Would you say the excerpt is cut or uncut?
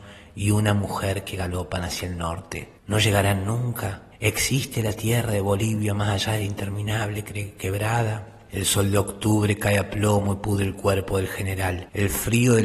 cut